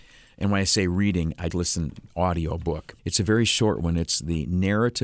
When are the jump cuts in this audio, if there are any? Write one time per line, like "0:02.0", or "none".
0:01.5
0:03.0